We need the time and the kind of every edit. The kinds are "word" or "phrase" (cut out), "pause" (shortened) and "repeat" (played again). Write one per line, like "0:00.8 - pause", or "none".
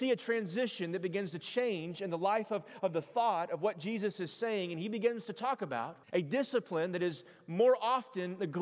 0:06.0 - pause